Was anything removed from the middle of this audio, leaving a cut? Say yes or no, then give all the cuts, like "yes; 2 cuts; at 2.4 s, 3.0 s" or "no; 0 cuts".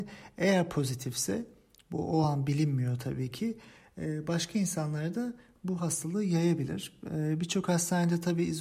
no; 0 cuts